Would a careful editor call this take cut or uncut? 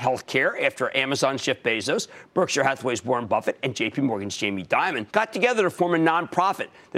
cut